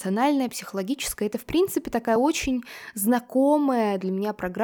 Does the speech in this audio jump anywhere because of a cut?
no; 0 cuts

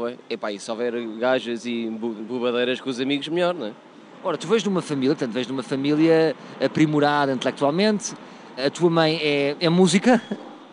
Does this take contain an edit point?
no; 0 cuts

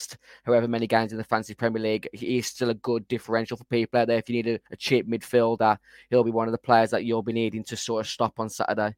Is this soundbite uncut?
no; 1 cut; at 4.7 s

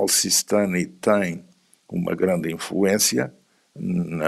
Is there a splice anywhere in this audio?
no; 0 cuts

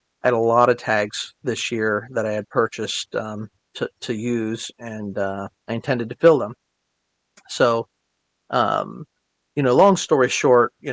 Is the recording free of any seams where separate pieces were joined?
no; 3 cuts; at 3.6 s, 5.6 s, 9.2 s

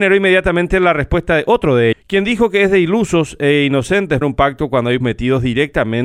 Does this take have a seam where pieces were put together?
yes; 3 cuts; at 1.9 s, 4.2 s, 5.0 s

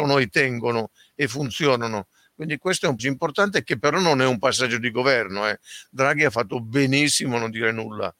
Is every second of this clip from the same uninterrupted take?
no; 1 cut; at 3.0 s

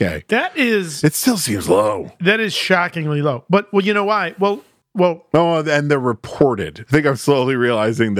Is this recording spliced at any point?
no; 0 cuts

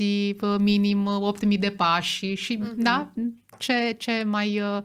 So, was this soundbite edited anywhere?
no; 0 cuts

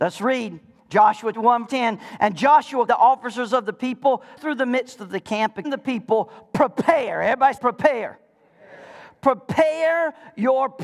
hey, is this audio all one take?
no; 6 cuts; at 1.3 s, 1.7 s, 2.9 s, 4.4 s, 5.6 s, 7.6 s

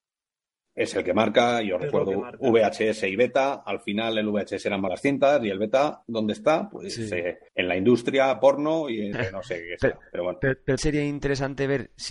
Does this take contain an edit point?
yes; 4 cuts; at 4.9 s, 7.5 s, 9.1 s, 10.8 s

